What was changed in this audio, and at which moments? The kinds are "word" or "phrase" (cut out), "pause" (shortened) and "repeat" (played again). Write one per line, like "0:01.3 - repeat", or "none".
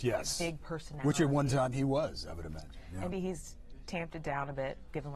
0:03.1 - word